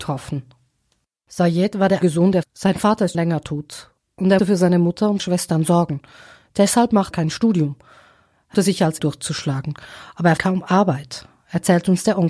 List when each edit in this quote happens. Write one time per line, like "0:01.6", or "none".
0:02.0
0:02.4
0:03.1
0:04.4
0:05.2
0:07.1
0:08.5
0:09.0
0:10.4